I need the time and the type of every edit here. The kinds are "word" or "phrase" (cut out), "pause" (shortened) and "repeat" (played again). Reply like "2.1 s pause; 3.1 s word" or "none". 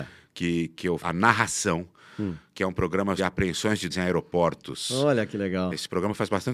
1.0 s word; 3.2 s word; 3.9 s word